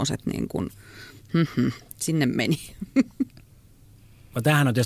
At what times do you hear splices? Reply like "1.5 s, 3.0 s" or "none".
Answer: none